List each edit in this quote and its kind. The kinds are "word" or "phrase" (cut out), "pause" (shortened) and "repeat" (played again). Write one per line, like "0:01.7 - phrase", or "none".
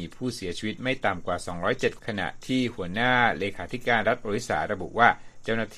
0:02.0 - phrase